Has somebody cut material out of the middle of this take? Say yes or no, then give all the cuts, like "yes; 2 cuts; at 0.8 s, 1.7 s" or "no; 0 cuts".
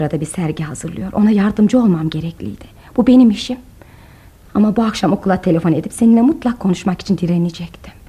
no; 0 cuts